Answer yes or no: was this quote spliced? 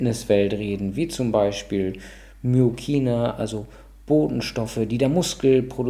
no